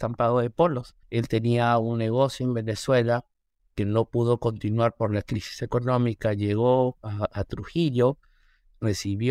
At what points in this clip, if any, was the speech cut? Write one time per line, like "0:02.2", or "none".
0:01.0